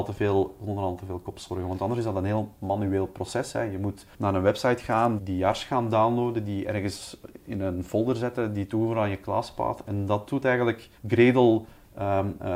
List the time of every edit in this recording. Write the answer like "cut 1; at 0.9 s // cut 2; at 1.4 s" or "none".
cut 1; at 4.1 s // cut 2; at 5.2 s // cut 3; at 11.0 s